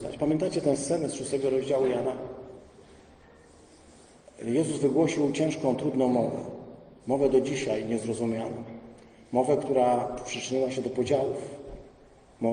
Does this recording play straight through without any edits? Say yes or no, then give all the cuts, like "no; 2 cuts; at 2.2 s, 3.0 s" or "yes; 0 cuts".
yes; 0 cuts